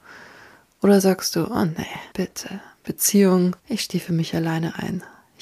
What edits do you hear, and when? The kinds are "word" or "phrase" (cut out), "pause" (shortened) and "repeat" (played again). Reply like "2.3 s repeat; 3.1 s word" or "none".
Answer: 2.1 s pause; 3.6 s pause